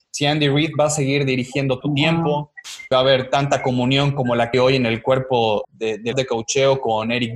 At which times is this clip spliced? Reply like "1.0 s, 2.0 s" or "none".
1.8 s, 2.9 s, 4.5 s, 5.6 s, 6.1 s

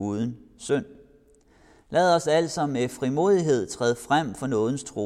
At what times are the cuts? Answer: none

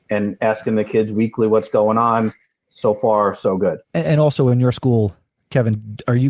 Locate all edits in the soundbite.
3.8 s

